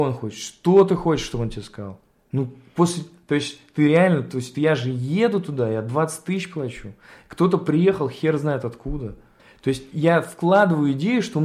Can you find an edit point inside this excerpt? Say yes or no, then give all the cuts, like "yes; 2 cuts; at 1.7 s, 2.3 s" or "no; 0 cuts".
yes; 2 cuts; at 2.1 s, 9.4 s